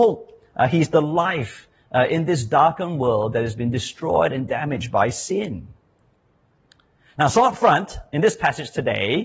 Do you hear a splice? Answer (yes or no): no